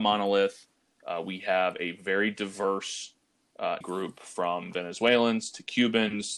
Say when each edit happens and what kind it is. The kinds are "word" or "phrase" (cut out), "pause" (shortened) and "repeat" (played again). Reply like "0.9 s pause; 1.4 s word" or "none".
3.8 s word